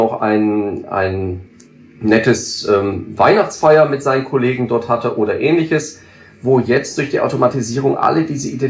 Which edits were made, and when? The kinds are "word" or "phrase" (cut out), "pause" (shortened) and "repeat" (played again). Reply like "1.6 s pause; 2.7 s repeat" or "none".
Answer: none